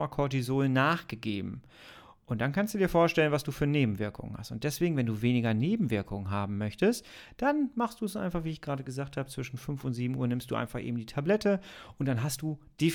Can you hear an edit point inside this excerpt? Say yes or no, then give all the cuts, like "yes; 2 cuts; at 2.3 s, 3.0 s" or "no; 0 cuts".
no; 0 cuts